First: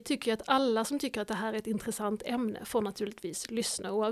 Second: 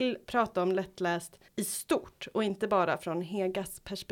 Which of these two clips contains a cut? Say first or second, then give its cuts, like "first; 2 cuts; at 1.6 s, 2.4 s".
second; 1 cut; at 1.5 s